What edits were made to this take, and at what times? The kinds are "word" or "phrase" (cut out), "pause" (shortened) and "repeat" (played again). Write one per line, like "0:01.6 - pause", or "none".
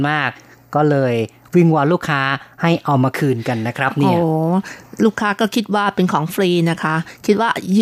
none